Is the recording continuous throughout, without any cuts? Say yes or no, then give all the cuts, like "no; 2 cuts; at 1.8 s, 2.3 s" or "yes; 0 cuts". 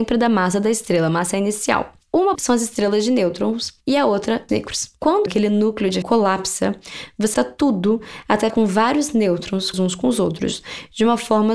no; 7 cuts; at 2.3 s, 4.5 s, 5.3 s, 6.0 s, 7.3 s, 8.5 s, 9.7 s